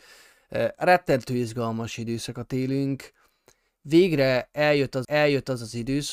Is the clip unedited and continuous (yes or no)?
no